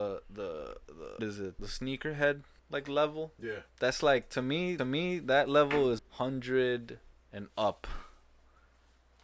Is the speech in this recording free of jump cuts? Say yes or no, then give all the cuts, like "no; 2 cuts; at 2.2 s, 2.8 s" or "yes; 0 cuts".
no; 7 cuts; at 1.2 s, 1.6 s, 2.6 s, 3.7 s, 4.8 s, 6.0 s, 7.1 s